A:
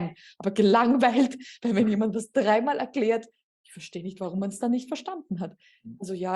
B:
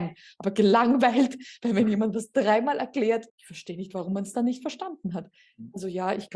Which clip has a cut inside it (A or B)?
B